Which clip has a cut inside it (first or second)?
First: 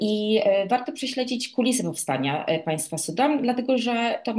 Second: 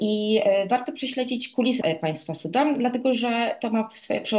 second